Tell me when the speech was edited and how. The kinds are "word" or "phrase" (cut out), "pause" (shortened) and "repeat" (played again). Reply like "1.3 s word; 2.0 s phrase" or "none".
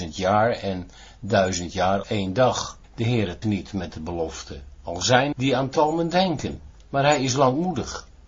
2.0 s word; 2.8 s pause; 3.4 s word; 5.3 s word; 6.8 s pause